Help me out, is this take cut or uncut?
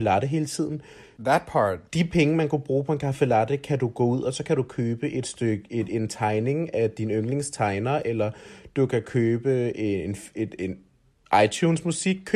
uncut